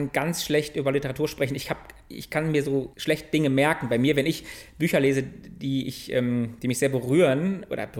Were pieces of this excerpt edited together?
yes; 1 cut; at 2.9 s

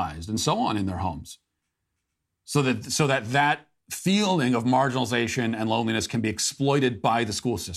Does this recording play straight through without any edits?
yes; 0 cuts

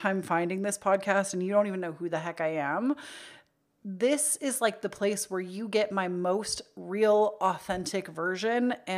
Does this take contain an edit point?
no; 0 cuts

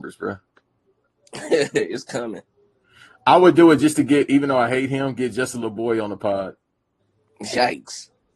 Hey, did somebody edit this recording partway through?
no; 0 cuts

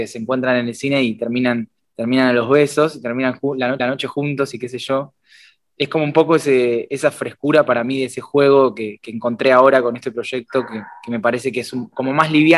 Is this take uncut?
no; 2 cuts; at 1.8 s, 3.8 s

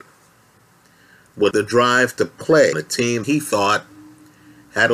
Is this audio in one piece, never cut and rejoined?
no; 3 cuts; at 1.5 s, 2.7 s, 3.2 s

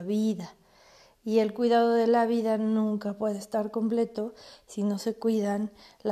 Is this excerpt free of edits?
yes; 0 cuts

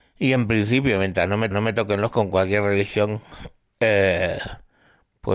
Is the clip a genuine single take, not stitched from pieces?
no; 2 cuts; at 1.5 s, 2.1 s

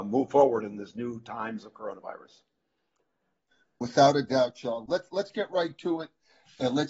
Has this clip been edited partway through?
no; 0 cuts

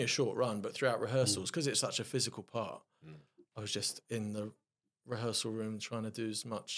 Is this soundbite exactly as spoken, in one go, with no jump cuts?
yes; 0 cuts

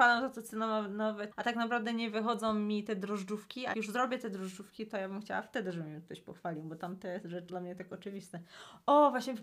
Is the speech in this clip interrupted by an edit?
yes; 3 cuts; at 1.3 s, 3.7 s, 7.5 s

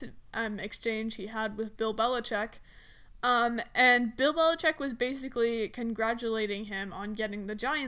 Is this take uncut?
yes; 0 cuts

